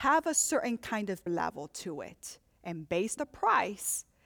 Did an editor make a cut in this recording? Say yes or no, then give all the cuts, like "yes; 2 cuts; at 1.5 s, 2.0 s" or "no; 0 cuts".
yes; 2 cuts; at 1.3 s, 3.2 s